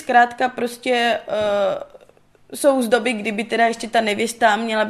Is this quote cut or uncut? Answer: uncut